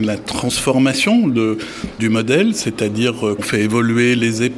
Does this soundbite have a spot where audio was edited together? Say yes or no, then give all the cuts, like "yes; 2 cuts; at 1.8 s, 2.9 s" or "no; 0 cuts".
yes; 2 cuts; at 2.0 s, 3.4 s